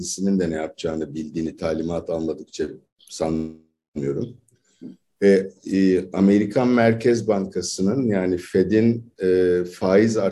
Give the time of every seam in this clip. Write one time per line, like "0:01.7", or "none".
none